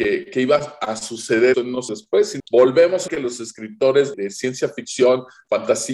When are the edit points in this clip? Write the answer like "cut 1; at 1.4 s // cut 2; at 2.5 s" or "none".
cut 1; at 1.5 s // cut 2; at 1.9 s // cut 3; at 2.4 s // cut 4; at 3.1 s // cut 5; at 4.1 s